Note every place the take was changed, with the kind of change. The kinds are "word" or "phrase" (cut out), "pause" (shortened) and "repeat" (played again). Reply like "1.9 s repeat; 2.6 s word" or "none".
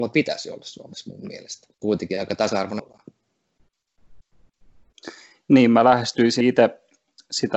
1.7 s pause; 2.8 s word; 6.4 s word